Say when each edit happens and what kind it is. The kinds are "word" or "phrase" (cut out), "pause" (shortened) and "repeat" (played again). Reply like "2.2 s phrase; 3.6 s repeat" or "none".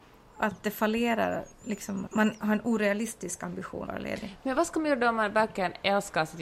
2.1 s word; 3.9 s word